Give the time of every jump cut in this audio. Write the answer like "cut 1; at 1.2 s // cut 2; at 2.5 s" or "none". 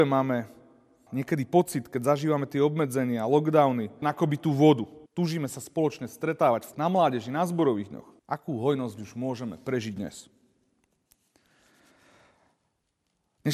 cut 1; at 1.1 s // cut 2; at 4.0 s // cut 3; at 5.1 s // cut 4; at 6.7 s // cut 5; at 8.2 s